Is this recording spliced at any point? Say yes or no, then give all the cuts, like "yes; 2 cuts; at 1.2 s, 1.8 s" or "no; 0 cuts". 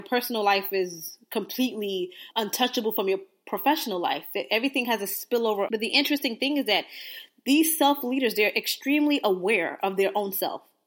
yes; 2 cuts; at 2.3 s, 5.7 s